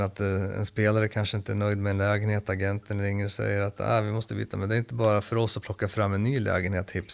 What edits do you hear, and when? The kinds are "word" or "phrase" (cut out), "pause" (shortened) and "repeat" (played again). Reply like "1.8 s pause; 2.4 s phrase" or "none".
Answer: none